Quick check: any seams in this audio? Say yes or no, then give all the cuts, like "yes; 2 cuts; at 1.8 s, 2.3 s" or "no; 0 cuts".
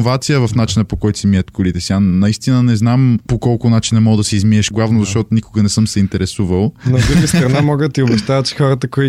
yes; 1 cut; at 4.7 s